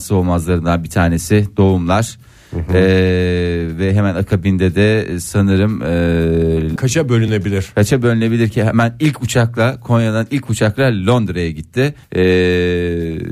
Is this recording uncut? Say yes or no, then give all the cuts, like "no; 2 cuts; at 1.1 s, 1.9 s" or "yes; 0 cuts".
no; 2 cuts; at 6.8 s, 12.0 s